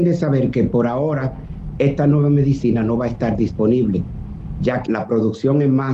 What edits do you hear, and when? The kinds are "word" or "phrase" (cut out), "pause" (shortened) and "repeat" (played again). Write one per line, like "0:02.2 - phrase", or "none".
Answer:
0:04.9 - word